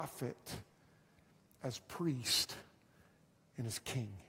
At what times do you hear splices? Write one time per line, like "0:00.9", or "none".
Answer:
none